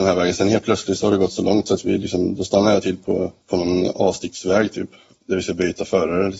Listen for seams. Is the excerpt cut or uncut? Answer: cut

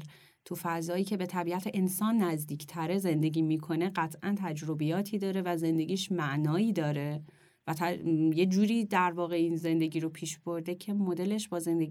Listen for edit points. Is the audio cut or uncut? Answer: uncut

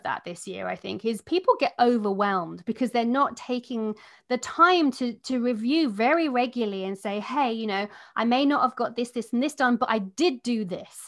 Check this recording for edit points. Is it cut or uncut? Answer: uncut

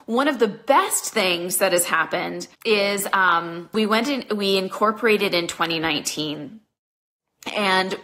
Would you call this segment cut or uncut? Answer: cut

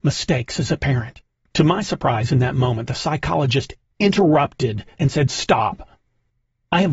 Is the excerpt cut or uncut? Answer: cut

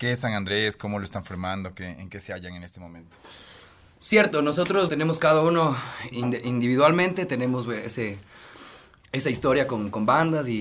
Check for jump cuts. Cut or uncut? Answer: cut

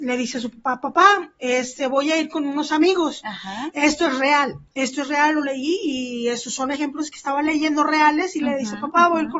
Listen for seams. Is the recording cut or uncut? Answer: uncut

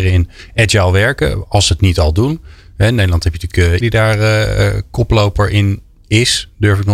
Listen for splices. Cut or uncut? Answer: cut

